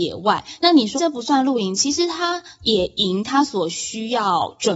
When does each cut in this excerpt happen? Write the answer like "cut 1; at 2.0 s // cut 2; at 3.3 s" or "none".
cut 1; at 1.0 s